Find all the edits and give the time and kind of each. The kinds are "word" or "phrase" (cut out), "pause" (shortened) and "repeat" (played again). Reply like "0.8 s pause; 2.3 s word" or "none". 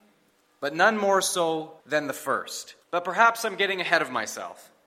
1.8 s pause; 2.8 s pause